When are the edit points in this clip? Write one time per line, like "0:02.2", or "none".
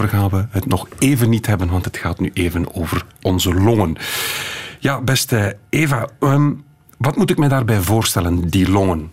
none